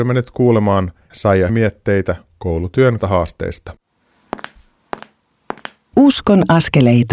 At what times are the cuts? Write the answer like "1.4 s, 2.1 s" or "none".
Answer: 1.1 s, 1.5 s, 3.0 s